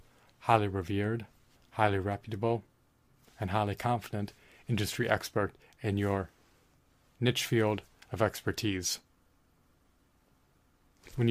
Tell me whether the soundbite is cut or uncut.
uncut